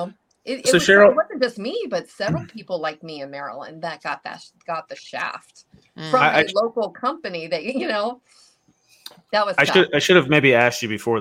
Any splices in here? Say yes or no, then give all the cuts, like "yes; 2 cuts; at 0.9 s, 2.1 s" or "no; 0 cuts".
no; 0 cuts